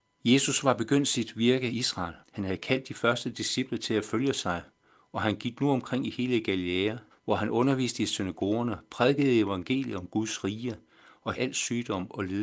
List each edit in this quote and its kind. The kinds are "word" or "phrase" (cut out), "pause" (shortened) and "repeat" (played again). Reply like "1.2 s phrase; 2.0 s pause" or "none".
1.7 s word; 2.2 s pause; 7.1 s pause; 11.3 s word